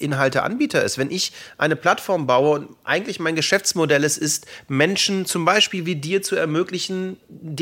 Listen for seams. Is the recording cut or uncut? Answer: uncut